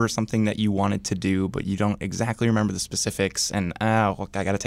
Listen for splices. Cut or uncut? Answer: uncut